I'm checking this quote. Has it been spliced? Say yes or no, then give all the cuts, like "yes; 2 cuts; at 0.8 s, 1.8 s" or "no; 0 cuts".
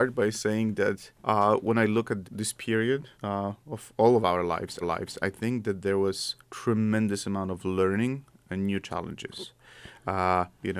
yes; 5 cuts; at 1.2 s, 2.2 s, 3.1 s, 4.8 s, 6.4 s